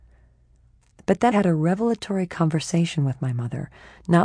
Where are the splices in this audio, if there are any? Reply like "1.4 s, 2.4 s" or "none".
1.3 s